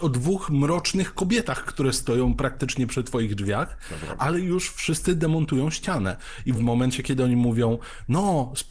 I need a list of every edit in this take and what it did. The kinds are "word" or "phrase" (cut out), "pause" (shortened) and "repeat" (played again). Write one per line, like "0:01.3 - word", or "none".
0:06.5 - word